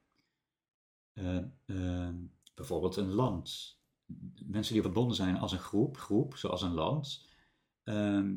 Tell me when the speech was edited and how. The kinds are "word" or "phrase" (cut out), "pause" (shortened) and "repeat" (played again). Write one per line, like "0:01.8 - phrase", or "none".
0:02.4 - pause
0:04.8 - phrase
0:06.0 - repeat